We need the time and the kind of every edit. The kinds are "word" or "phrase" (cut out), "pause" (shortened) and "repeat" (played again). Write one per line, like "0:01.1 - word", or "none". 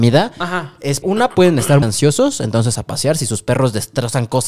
0:01.0 - word
0:01.8 - word
0:02.8 - word